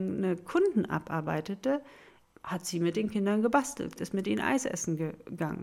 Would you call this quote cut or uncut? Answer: cut